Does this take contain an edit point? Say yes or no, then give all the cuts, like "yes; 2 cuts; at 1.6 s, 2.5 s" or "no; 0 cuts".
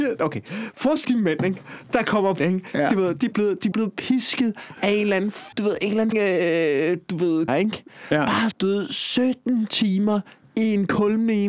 yes; 8 cuts; at 1.0 s, 2.4 s, 3.3 s, 3.7 s, 5.5 s, 6.1 s, 7.5 s, 8.5 s